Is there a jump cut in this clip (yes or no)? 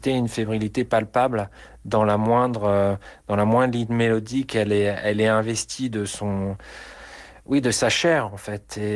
no